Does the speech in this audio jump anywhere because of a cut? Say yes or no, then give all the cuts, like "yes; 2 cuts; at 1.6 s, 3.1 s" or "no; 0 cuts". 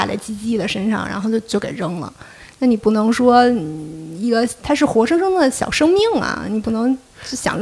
no; 0 cuts